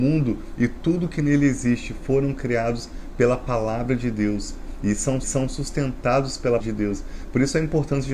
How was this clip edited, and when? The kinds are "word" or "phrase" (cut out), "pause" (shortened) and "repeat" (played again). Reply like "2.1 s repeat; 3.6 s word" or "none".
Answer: 5.2 s repeat; 6.6 s word